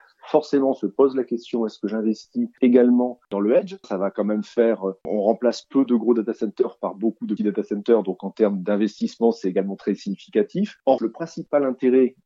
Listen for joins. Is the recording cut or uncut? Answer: cut